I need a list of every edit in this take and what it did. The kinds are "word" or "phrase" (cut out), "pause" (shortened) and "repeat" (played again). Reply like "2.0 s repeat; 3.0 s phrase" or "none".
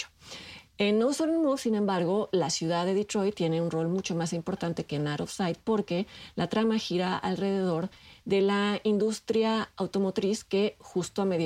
none